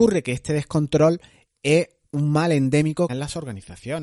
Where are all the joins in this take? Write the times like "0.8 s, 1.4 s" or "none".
3.1 s